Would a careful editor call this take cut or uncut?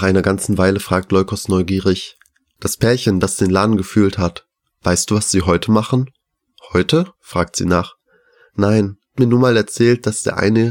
cut